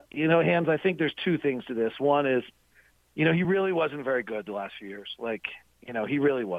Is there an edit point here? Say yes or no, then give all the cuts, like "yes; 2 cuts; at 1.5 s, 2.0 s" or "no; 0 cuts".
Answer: no; 0 cuts